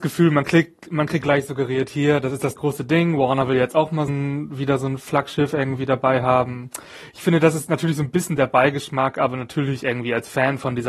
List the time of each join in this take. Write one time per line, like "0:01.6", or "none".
0:01.2
0:02.6
0:04.1